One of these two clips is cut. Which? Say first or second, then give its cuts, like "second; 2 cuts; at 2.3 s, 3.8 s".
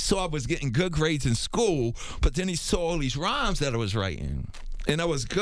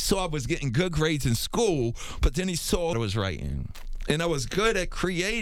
second; 1 cut; at 2.9 s